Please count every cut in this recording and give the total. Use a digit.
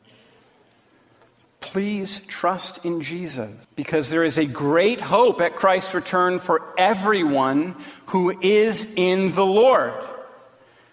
1